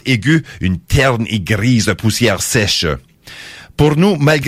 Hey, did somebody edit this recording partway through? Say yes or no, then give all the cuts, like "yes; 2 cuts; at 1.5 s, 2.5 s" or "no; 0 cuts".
no; 0 cuts